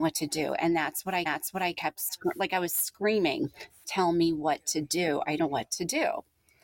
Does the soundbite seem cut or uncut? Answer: cut